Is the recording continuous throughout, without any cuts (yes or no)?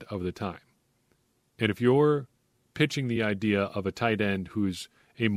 yes